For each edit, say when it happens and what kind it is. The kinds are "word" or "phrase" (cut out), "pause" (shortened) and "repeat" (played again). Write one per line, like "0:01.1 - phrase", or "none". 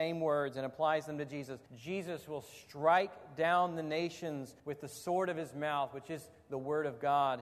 0:01.7 - pause
0:04.6 - pause